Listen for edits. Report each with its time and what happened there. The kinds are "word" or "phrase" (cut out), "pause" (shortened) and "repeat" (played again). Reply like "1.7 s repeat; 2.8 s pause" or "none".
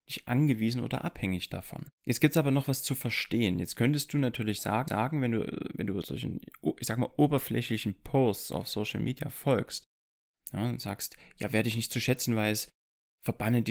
1.9 s pause; 4.9 s repeat; 6.0 s word